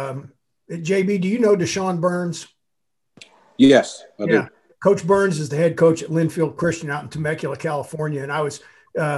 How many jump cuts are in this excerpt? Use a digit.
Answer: 0